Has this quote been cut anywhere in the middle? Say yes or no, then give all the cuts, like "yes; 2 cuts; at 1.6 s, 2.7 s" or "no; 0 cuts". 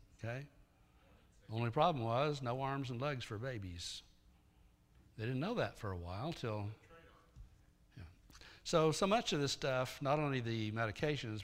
no; 0 cuts